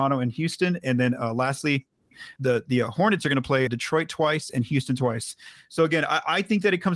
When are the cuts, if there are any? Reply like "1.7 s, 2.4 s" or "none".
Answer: 2.4 s, 3.7 s